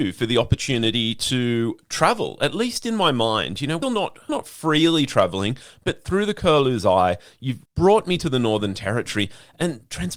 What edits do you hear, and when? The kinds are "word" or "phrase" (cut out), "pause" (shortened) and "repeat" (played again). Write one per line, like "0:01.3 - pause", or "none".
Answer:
0:03.8 - word
0:04.3 - word
0:07.7 - pause